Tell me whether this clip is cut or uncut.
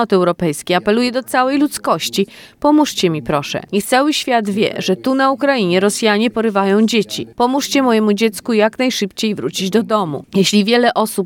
uncut